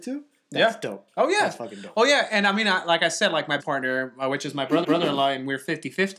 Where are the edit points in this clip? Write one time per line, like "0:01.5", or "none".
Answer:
0:03.6
0:04.8